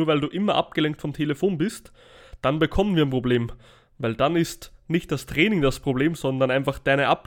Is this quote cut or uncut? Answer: uncut